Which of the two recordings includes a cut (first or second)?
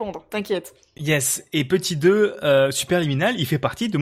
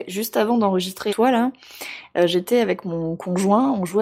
second